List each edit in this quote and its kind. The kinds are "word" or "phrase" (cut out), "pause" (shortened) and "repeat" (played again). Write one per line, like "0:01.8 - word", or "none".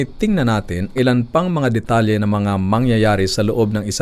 0:01.0 - word